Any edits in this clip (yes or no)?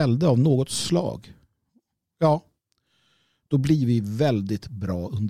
no